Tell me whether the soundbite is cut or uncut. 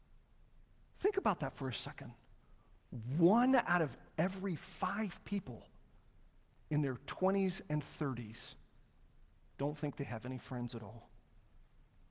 cut